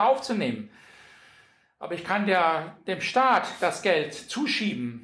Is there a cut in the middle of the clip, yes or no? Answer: no